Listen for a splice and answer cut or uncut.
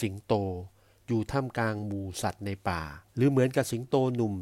cut